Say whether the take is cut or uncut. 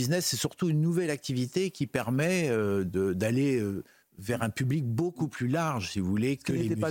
uncut